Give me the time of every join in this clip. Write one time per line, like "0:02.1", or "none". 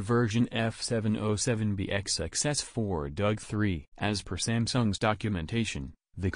0:03.9